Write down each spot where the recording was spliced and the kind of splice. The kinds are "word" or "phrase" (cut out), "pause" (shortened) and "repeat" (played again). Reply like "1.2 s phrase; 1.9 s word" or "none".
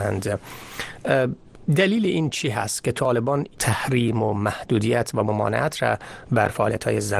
3.5 s phrase